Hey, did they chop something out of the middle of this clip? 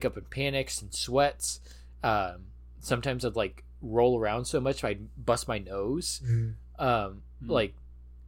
no; 0 cuts

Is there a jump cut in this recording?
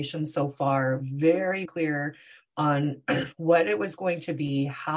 yes; 1 cut; at 1.7 s

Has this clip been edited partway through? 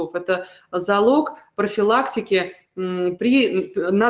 no; 0 cuts

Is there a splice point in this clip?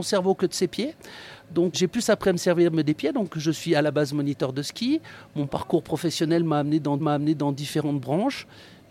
yes; 2 cuts; at 1.7 s, 7.0 s

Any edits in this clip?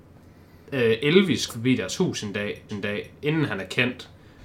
yes; 2 cuts; at 1.5 s, 2.7 s

